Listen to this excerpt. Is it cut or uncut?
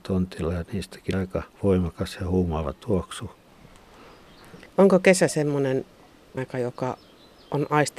cut